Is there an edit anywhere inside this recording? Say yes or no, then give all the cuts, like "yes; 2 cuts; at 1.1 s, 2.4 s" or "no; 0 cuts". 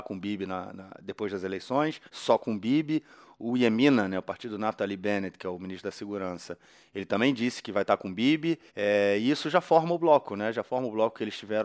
yes; 2 cuts; at 2.1 s, 8.7 s